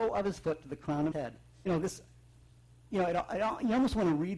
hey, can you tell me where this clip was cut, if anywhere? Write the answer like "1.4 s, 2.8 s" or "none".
1.1 s, 1.6 s

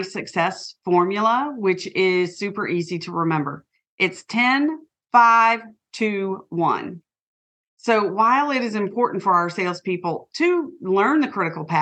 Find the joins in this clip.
none

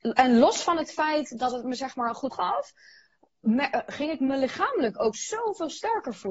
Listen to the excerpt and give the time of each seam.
2.3 s, 5.1 s

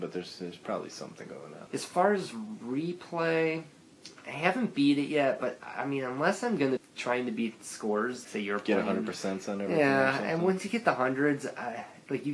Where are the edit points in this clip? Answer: 1.7 s, 6.8 s, 8.2 s

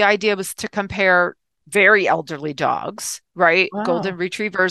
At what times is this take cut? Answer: none

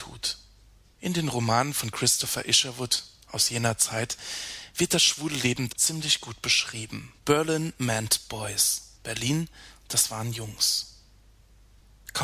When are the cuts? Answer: 5.7 s, 7.2 s, 9.0 s

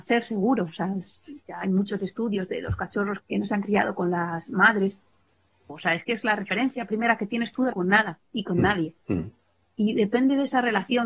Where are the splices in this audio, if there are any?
1.4 s, 3.2 s, 7.7 s, 9.0 s

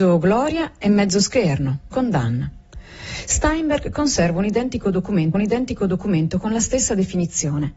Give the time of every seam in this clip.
1.9 s, 5.3 s

